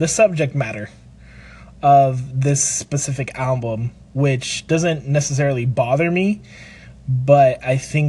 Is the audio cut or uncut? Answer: cut